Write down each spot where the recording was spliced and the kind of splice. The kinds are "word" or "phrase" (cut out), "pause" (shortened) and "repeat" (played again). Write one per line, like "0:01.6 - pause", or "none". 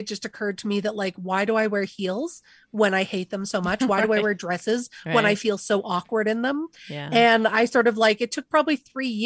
none